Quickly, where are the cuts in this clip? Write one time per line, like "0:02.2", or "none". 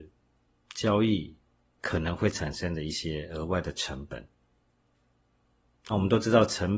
none